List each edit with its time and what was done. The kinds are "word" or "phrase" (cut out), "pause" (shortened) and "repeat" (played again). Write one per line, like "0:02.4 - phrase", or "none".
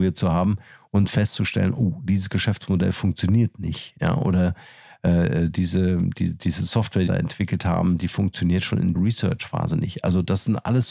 0:07.1 - phrase
0:08.9 - word